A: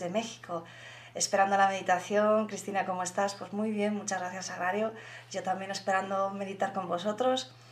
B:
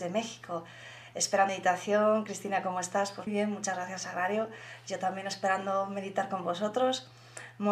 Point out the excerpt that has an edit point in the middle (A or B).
B